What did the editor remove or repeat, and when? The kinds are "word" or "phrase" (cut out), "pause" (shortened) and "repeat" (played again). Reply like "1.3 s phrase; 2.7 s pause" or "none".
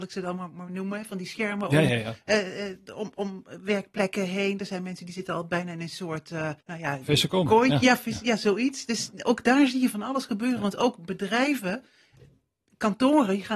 6.6 s pause